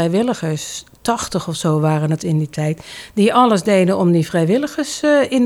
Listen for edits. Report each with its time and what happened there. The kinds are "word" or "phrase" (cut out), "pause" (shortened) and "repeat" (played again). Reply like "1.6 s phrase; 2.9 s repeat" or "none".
none